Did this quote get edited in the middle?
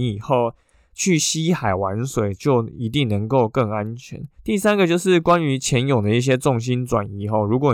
yes; 1 cut; at 4.3 s

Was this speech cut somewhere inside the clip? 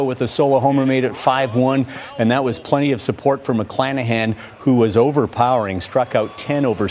no; 0 cuts

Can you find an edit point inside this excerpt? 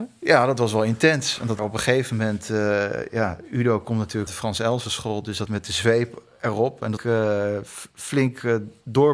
yes; 4 cuts; at 1.6 s, 4.3 s, 5.5 s, 7.0 s

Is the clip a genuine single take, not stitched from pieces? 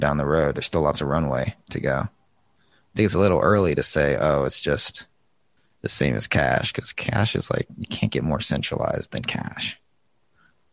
no; 1 cut; at 5.6 s

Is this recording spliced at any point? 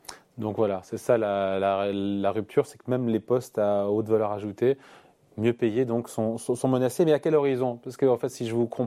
no; 0 cuts

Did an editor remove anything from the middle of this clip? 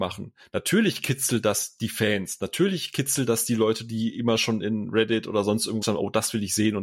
yes; 1 cut; at 5.8 s

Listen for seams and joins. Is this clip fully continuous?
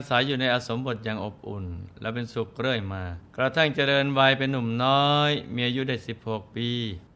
no; 1 cut; at 3.3 s

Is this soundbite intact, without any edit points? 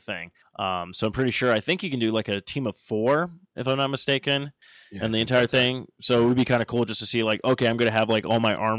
yes; 0 cuts

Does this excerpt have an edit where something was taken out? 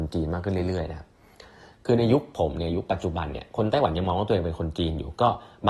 no; 0 cuts

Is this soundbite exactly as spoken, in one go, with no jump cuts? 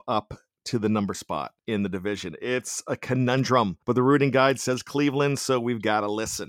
no; 3 cuts; at 1.1 s, 1.6 s, 3.8 s

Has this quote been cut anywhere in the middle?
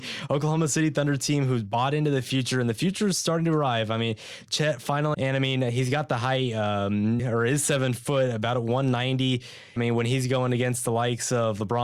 yes; 3 cuts; at 5.1 s, 7.2 s, 9.8 s

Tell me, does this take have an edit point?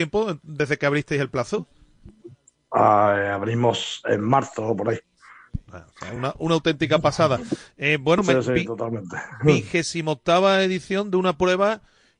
no; 0 cuts

